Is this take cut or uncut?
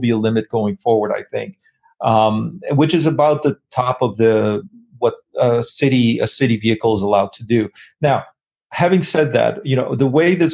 uncut